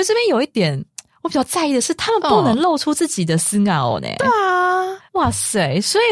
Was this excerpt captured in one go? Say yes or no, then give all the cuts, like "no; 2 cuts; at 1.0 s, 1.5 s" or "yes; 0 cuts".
no; 1 cut; at 5.1 s